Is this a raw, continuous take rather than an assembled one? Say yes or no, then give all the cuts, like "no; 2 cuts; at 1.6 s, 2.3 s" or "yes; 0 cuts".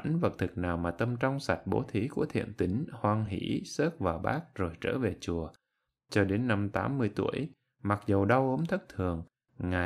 yes; 0 cuts